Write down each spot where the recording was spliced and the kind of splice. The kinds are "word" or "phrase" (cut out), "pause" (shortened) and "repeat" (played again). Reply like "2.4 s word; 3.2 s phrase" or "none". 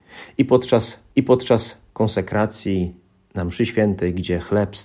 1.2 s repeat